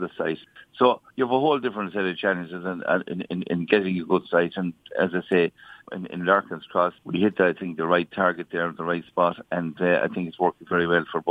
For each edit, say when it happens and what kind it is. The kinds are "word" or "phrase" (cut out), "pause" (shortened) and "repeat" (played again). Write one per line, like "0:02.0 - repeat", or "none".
0:01.1 - pause
0:07.0 - pause